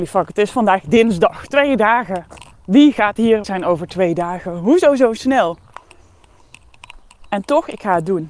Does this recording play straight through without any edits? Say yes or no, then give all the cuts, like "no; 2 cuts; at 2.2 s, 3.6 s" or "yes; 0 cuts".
no; 1 cut; at 3.4 s